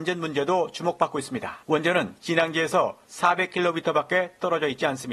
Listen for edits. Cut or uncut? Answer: cut